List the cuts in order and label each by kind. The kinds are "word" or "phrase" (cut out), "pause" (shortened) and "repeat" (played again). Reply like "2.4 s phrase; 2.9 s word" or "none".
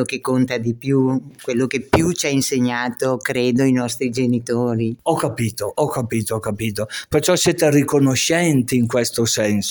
none